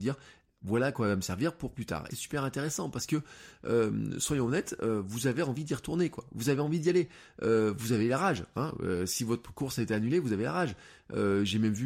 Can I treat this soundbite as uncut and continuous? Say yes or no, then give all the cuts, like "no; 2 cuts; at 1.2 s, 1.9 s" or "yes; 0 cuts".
no; 1 cut; at 2.1 s